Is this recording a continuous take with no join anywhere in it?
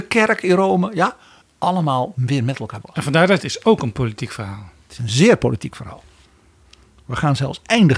no; 3 cuts; at 1.4 s, 2.8 s, 3.4 s

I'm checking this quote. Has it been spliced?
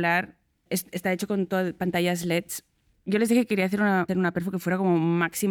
no; 0 cuts

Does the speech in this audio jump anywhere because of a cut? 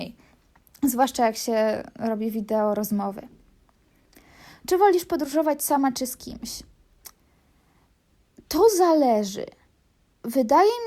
no; 0 cuts

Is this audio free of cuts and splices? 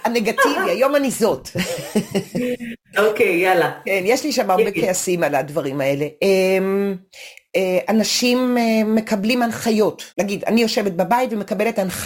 no; 1 cut; at 10.1 s

